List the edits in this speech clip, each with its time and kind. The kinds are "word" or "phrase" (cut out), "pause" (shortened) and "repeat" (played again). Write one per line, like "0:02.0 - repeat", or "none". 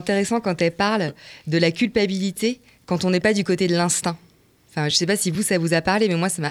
none

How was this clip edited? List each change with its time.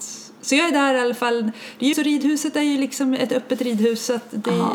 0:01.9 - word

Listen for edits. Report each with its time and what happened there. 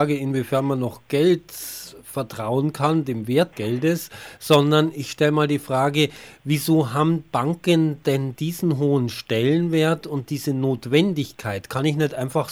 0:03.5 - word

